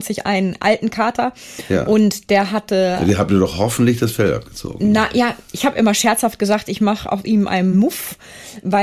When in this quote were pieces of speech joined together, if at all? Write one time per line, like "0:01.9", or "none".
none